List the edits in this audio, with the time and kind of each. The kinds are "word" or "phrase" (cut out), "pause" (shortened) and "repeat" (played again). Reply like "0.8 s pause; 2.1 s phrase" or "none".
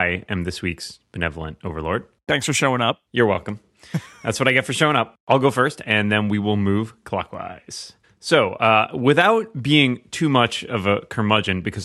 3.1 s pause; 8.0 s pause